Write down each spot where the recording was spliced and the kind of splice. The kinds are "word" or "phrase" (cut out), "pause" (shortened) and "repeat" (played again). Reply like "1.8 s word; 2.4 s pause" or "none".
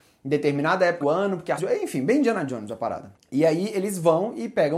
1.0 s word; 1.6 s word